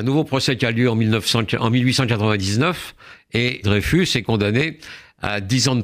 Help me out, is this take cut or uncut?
cut